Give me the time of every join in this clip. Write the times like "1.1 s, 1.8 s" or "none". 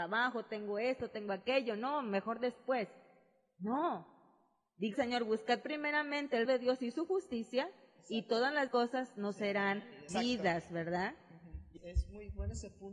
4.9 s, 6.5 s, 8.7 s, 10.1 s, 11.8 s